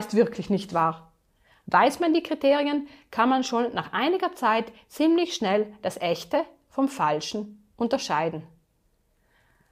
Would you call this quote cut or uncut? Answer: uncut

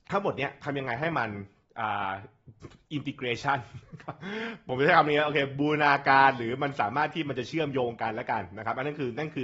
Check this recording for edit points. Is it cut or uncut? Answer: uncut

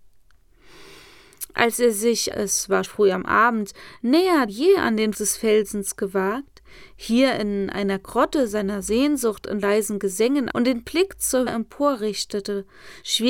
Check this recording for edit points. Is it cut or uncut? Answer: cut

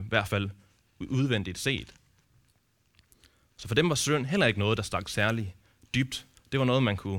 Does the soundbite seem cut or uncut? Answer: uncut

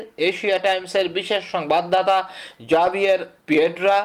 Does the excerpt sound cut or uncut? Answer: uncut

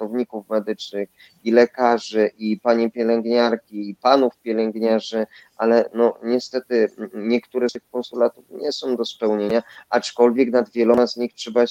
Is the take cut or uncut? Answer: uncut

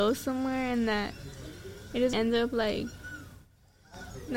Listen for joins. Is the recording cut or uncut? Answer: cut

